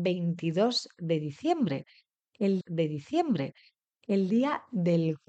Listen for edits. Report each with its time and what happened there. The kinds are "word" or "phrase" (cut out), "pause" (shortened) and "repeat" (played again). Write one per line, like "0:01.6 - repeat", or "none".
0:02.6 - repeat